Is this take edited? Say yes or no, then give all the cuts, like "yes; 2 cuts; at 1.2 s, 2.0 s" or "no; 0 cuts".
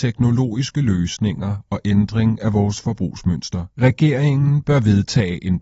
yes; 1 cut; at 3.7 s